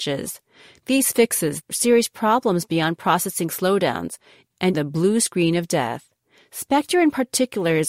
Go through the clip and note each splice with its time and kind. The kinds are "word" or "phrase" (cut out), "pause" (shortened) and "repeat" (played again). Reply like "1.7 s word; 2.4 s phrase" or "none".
1.6 s phrase; 4.7 s word